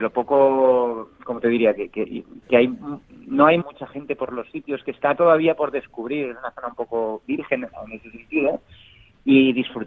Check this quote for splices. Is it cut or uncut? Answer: cut